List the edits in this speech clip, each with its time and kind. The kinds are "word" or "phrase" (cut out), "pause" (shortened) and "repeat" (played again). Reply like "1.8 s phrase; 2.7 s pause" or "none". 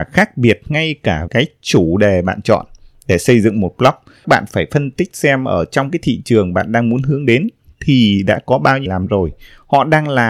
1.3 s word; 4.2 s word; 8.9 s word